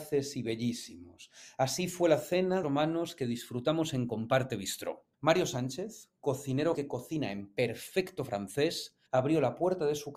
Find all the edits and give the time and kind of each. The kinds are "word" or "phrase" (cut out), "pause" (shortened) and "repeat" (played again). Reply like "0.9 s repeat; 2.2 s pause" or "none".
2.6 s phrase; 5.1 s pause; 6.7 s word; 9.1 s pause